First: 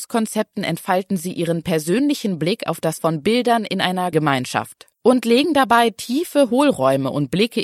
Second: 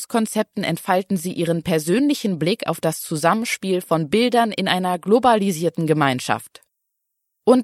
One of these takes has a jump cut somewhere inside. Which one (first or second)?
first